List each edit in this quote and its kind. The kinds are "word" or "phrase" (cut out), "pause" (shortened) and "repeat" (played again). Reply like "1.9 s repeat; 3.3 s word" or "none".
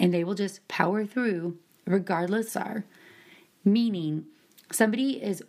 2.5 s phrase